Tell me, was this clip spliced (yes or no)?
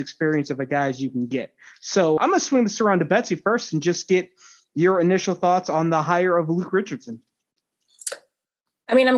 yes